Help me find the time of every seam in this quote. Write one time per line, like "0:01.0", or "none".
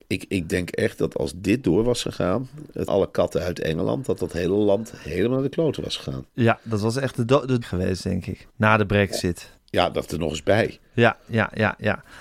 0:02.9
0:07.3
0:07.6
0:08.5
0:09.6